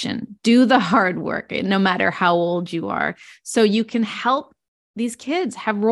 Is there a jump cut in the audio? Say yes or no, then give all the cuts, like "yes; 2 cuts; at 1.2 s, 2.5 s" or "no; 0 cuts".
no; 0 cuts